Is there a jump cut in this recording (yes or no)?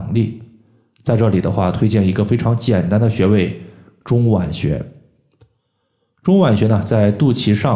no